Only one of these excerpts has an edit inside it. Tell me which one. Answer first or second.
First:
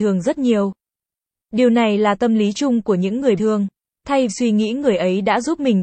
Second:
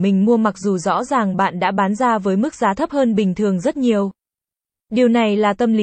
first